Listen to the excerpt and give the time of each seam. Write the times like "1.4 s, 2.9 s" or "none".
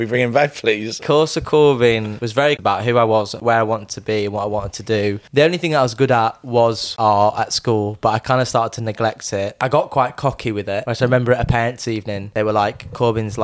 2.6 s